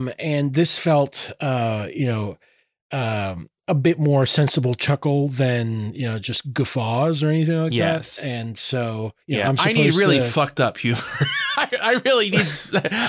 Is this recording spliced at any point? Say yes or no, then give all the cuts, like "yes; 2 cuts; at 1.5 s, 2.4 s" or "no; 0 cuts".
yes; 1 cut; at 9.2 s